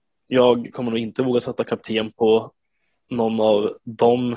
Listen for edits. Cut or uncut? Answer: uncut